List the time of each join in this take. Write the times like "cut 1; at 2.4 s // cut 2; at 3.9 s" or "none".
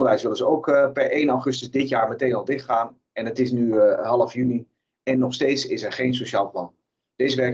none